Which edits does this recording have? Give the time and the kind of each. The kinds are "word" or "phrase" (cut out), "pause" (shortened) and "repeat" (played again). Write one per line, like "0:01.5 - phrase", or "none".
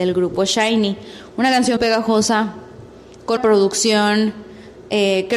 0:01.8 - word
0:03.4 - word